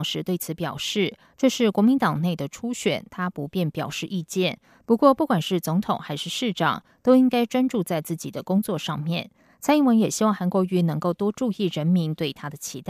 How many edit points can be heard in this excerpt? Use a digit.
0